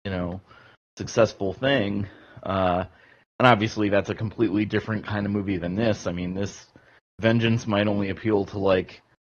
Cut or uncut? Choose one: uncut